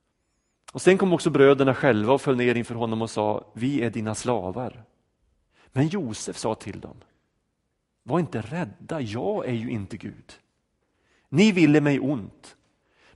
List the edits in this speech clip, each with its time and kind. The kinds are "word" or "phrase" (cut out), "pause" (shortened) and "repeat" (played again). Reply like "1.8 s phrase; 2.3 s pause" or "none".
none